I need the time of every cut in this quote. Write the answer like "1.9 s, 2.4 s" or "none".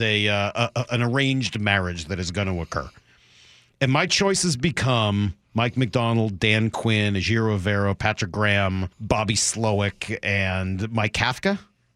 8.9 s